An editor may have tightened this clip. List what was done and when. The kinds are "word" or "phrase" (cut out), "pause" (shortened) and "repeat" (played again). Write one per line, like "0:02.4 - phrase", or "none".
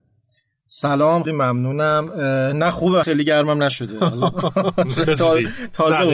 0:01.3 - word
0:03.0 - word